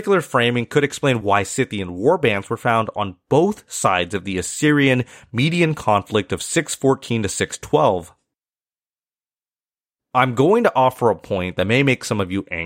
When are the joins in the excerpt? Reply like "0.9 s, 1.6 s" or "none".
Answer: none